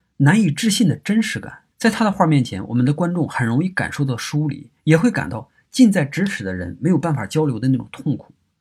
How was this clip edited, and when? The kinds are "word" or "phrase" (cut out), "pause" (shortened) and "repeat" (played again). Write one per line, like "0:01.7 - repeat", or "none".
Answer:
0:01.7 - pause
0:04.8 - pause